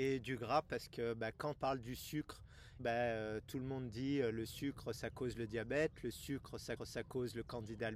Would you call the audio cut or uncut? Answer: cut